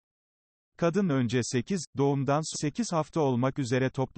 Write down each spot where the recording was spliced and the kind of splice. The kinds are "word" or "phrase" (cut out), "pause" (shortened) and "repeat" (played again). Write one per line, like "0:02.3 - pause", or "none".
0:01.1 - phrase
0:02.5 - word